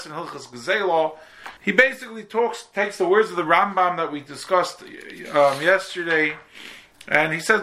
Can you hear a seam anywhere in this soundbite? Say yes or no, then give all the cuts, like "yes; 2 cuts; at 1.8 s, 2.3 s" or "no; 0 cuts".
yes; 1 cut; at 1.6 s